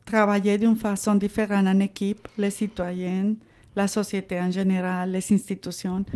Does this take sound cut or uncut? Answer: uncut